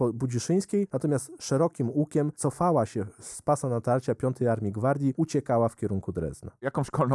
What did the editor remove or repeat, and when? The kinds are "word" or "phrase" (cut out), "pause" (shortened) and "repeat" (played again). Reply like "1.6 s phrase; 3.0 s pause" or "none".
none